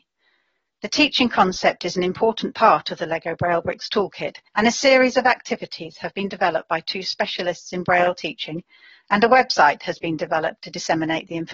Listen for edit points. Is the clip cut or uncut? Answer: cut